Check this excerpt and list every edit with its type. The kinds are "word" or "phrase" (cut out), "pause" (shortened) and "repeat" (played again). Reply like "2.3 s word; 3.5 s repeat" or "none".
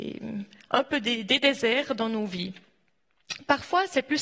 none